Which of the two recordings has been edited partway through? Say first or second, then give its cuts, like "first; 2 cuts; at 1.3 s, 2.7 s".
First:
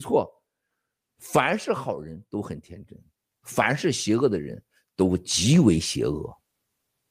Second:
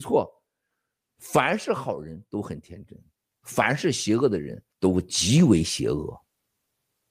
second; 1 cut; at 4.7 s